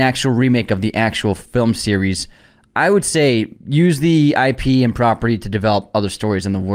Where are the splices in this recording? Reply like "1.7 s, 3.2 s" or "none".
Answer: 3.5 s